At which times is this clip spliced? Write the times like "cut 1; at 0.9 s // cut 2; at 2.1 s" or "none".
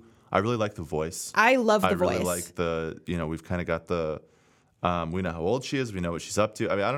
none